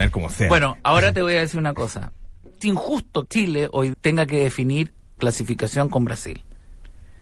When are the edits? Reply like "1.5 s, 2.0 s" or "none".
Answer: 2.6 s, 3.3 s, 3.9 s, 5.2 s